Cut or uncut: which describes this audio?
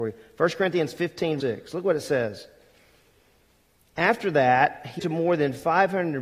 cut